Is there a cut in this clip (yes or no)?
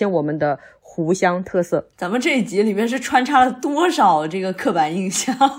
yes